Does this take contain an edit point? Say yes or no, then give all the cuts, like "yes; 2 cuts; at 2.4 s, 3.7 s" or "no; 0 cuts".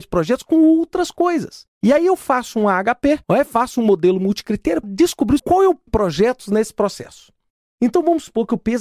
yes; 5 cuts; at 1.7 s, 3.2 s, 4.8 s, 5.4 s, 5.9 s